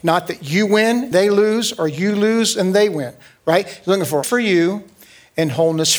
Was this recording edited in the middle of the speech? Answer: yes; 2 cuts; at 1.1 s, 4.2 s

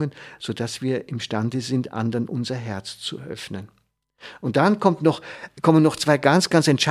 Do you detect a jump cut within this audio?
no; 0 cuts

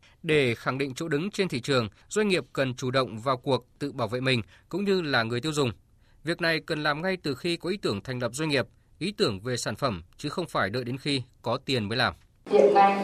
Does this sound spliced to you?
no; 0 cuts

